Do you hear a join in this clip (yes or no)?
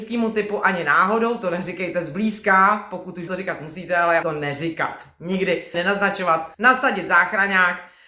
yes